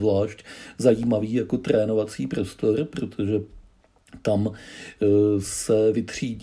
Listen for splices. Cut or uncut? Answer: uncut